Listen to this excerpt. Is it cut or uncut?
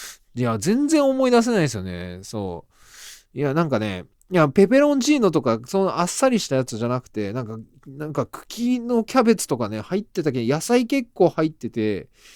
uncut